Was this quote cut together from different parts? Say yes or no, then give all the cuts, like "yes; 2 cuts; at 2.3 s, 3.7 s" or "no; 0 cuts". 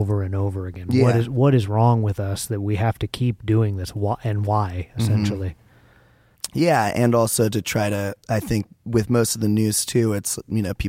yes; 2 cuts; at 8.2 s, 8.7 s